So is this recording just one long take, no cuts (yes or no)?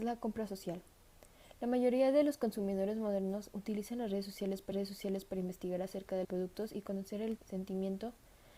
no